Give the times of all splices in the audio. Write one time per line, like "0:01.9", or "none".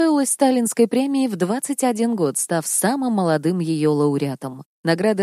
none